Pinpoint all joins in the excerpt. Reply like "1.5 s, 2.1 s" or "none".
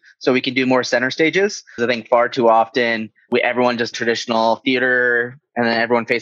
1.8 s, 3.9 s